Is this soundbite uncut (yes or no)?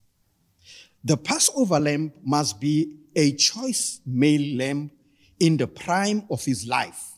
yes